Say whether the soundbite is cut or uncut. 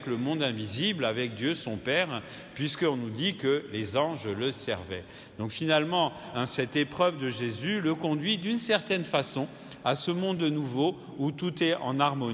uncut